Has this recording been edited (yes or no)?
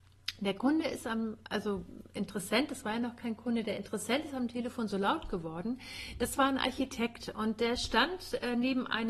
no